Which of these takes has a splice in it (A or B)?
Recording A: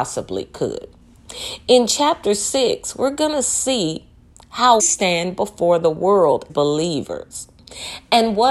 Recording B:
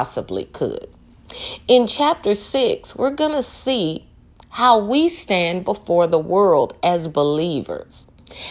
A